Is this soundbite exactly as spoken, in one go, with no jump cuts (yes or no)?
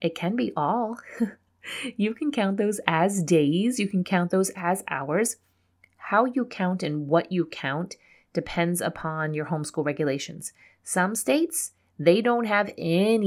yes